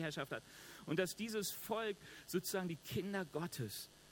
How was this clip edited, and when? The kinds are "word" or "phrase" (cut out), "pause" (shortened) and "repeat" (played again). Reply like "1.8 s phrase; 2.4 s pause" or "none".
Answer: none